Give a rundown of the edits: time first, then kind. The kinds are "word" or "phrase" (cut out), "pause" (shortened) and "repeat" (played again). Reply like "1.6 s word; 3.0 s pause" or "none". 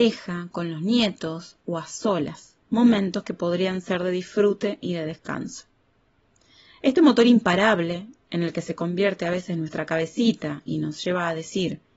2.6 s pause